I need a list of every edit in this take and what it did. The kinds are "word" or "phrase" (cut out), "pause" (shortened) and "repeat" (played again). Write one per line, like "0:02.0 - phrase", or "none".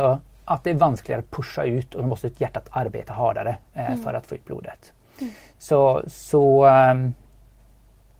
none